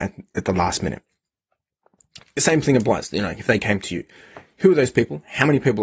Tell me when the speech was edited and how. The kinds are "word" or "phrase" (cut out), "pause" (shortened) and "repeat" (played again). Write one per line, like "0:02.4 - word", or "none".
none